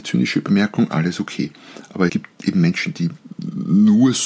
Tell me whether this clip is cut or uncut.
cut